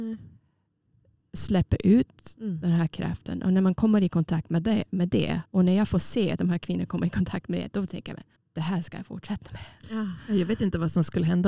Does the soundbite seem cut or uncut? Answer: cut